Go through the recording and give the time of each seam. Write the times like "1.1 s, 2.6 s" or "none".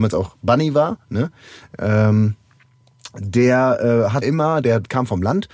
4.2 s